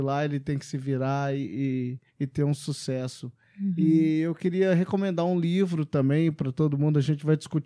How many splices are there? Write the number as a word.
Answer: one